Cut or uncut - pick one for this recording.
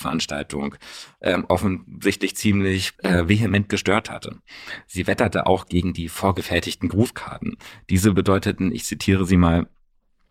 cut